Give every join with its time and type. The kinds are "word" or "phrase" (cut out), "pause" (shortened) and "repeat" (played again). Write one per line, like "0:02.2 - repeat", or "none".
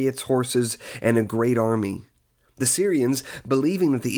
none